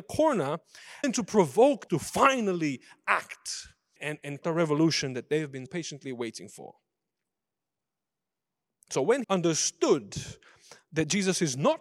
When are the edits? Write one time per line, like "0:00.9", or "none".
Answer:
0:01.0
0:01.9
0:04.0
0:04.4
0:05.7
0:09.2